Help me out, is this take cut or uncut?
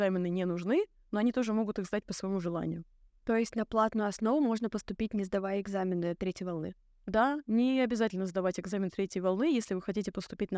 uncut